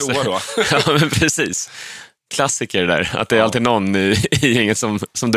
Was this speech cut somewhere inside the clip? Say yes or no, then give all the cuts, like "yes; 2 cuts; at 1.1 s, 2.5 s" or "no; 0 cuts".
no; 0 cuts